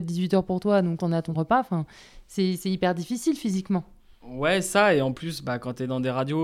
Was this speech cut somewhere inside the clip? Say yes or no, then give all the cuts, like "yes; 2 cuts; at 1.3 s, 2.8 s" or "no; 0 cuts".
yes; 2 cuts; at 1.0 s, 1.3 s